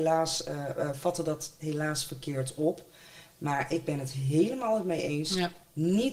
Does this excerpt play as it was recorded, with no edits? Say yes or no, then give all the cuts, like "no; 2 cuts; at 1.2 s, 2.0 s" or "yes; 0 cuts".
yes; 0 cuts